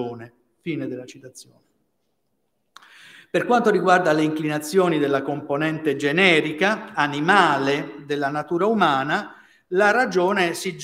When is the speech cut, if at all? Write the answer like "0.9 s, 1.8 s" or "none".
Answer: none

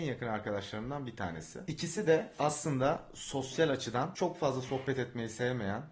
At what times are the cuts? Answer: none

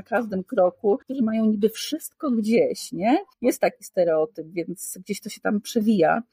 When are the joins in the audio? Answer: 1.0 s, 3.3 s

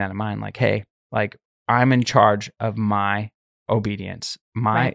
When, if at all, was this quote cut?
none

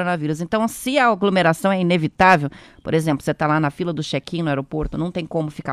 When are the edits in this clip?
none

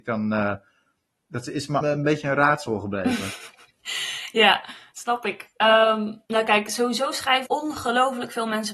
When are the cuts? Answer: 1.8 s, 6.3 s, 7.5 s

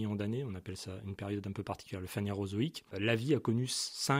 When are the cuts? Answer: 2.9 s

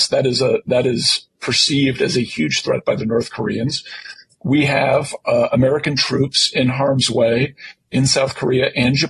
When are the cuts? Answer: none

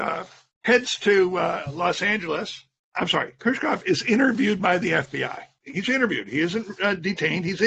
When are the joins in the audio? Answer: 5.8 s

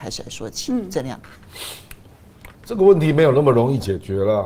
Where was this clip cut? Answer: 2.5 s

